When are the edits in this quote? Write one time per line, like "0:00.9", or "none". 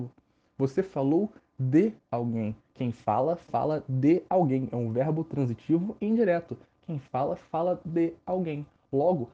none

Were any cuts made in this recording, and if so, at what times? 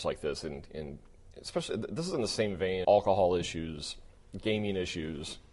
0:02.8

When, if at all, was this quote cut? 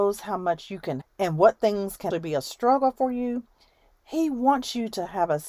0:01.0
0:02.1

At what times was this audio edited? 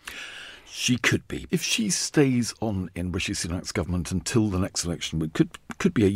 0:01.5

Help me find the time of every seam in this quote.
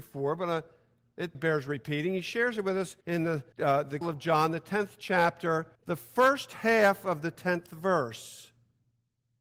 0:01.3
0:03.0
0:03.5
0:04.0
0:05.7

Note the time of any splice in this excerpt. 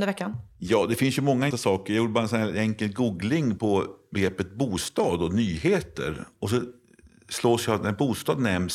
0:01.5
0:03.6

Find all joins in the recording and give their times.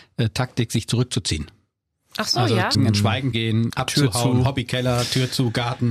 0:02.7
0:03.3
0:03.7

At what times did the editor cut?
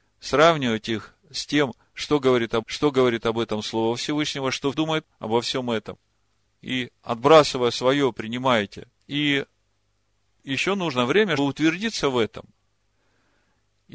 0:02.6
0:04.7
0:09.0
0:11.4

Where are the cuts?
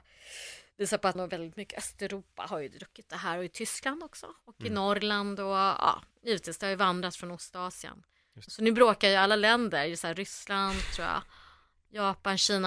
0:01.1
0:06.1
0:08.5

